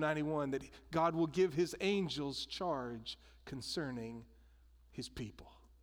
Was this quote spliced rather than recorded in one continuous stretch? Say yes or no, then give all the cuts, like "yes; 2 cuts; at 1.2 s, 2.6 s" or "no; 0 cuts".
no; 0 cuts